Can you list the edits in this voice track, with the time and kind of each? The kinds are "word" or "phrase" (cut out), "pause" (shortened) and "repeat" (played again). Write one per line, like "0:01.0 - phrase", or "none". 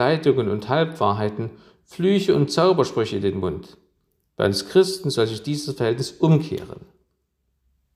none